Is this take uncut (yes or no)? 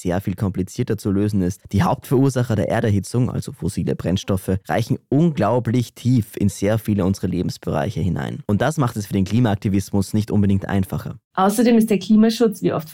yes